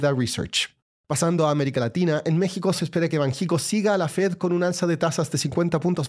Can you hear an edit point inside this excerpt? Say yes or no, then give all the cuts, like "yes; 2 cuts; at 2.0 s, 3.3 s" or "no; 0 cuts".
yes; 1 cut; at 0.9 s